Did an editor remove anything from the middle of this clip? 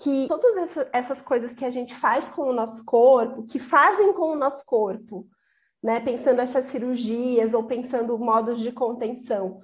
no; 0 cuts

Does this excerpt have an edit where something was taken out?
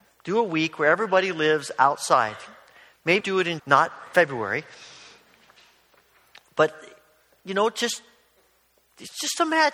yes; 2 cuts; at 3.2 s, 3.6 s

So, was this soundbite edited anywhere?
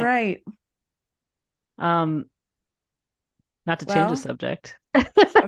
no; 0 cuts

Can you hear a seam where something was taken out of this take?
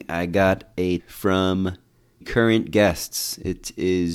yes; 2 cuts; at 1.0 s, 2.2 s

